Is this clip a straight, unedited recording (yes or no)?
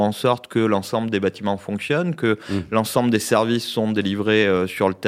yes